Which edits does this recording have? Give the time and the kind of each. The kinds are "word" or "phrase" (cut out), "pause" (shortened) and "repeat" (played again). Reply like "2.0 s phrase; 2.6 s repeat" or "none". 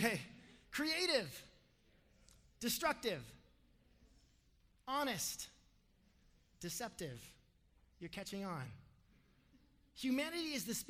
none